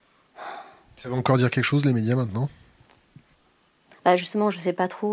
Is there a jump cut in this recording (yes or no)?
no